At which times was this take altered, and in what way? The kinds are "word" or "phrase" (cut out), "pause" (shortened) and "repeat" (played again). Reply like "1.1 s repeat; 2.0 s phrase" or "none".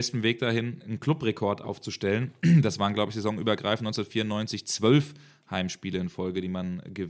none